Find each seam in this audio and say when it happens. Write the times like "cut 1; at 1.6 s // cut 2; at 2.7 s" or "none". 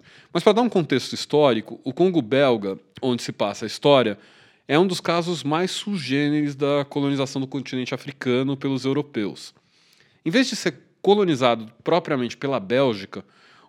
none